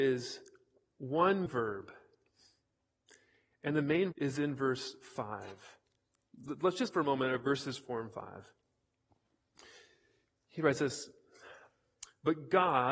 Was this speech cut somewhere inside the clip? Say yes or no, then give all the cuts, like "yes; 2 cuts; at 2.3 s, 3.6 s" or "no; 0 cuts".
yes; 3 cuts; at 1.5 s, 4.1 s, 6.9 s